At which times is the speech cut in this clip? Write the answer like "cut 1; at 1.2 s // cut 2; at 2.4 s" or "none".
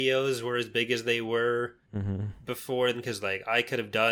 cut 1; at 1.8 s // cut 2; at 2.9 s

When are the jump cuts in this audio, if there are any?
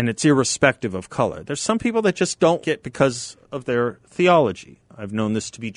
cut 1; at 2.6 s // cut 2; at 3.4 s

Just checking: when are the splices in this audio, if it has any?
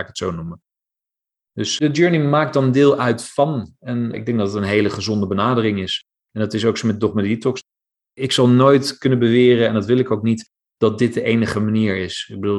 none

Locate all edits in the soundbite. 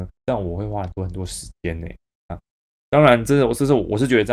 none

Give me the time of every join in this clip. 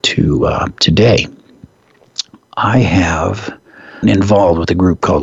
cut 1; at 4.0 s

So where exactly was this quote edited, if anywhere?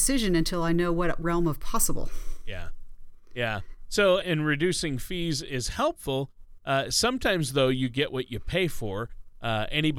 cut 1; at 1.2 s // cut 2; at 4.2 s

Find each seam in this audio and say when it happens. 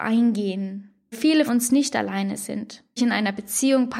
cut 1; at 1.1 s // cut 2; at 1.5 s // cut 3; at 3.0 s

